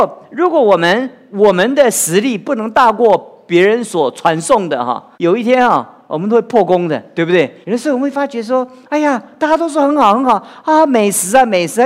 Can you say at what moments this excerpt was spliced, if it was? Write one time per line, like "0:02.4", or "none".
0:05.1
0:07.6